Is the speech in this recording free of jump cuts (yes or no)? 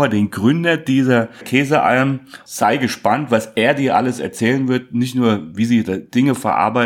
yes